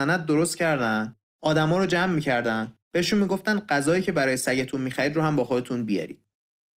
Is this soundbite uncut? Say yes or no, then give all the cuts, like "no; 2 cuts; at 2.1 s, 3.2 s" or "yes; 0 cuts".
no; 1 cut; at 2.8 s